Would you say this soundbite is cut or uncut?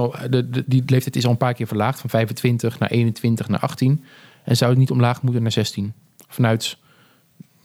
uncut